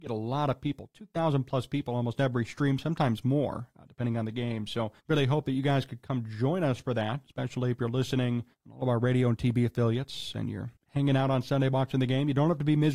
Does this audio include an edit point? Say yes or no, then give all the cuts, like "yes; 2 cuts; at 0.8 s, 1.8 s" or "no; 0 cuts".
yes; 3 cuts; at 5.0 s, 8.5 s, 10.8 s